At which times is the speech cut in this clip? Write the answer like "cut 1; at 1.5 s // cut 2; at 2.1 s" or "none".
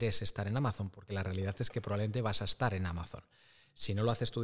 none